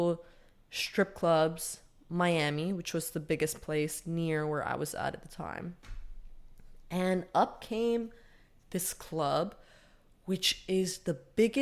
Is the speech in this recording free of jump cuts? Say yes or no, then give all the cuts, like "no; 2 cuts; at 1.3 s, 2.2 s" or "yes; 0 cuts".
yes; 0 cuts